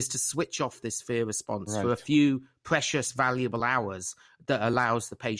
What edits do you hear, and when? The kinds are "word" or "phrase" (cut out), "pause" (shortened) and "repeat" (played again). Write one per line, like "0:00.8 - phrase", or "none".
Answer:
none